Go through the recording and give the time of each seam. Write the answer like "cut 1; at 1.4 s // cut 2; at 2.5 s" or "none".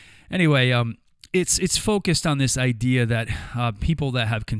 none